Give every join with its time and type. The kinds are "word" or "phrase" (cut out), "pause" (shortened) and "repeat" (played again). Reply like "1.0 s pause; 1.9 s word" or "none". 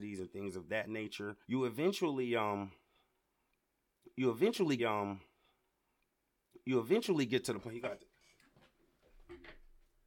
1.4 s pause; 4.8 s repeat